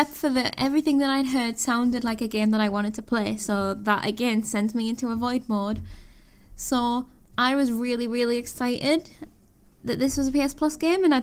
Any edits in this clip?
no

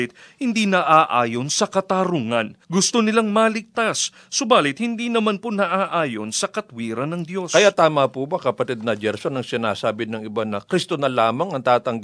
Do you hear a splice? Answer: yes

